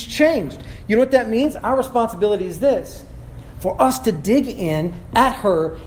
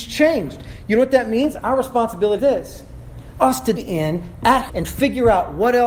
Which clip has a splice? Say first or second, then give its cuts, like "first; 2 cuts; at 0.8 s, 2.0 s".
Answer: second; 4 cuts; at 2.4 s, 3.4 s, 3.8 s, 4.7 s